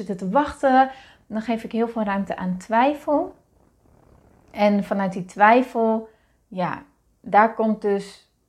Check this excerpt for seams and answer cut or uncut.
uncut